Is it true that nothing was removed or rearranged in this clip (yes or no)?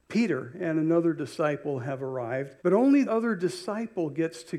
no